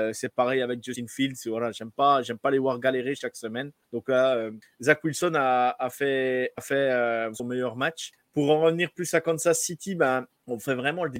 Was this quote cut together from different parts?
yes; 1 cut; at 7.3 s

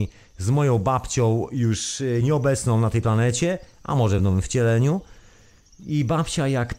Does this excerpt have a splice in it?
no; 0 cuts

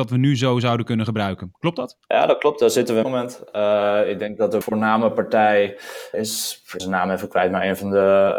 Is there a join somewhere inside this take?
yes; 4 cuts; at 3.0 s, 4.6 s, 6.1 s, 6.8 s

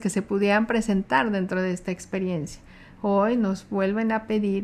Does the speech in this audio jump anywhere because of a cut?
no; 0 cuts

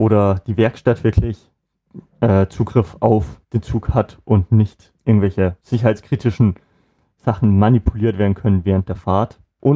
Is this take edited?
yes; 1 cut; at 3.4 s

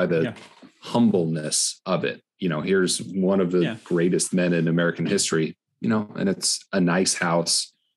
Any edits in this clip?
no; 0 cuts

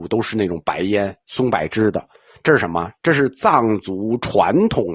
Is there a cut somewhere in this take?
no; 0 cuts

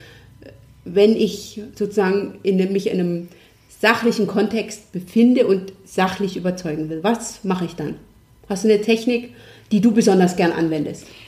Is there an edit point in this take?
no; 0 cuts

